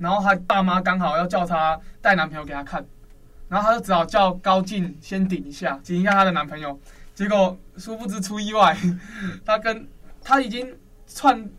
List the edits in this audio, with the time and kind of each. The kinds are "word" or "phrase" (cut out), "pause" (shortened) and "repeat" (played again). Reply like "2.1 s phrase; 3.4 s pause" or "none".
5.8 s word